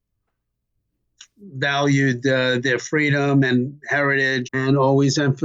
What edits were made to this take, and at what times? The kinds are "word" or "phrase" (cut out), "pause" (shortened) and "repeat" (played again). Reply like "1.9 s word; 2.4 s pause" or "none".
4.4 s word